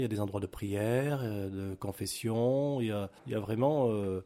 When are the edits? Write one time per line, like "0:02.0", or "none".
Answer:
0:03.2